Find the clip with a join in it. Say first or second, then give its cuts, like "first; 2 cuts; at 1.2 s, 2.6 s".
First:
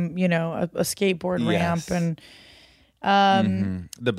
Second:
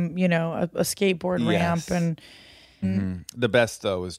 second; 1 cut; at 2.8 s